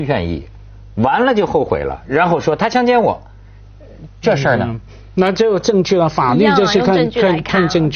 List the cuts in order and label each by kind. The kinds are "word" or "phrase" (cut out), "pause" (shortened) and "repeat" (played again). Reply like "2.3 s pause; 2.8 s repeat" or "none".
none